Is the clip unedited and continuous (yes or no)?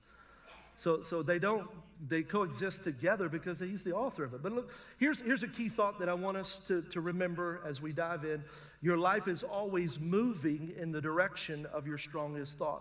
yes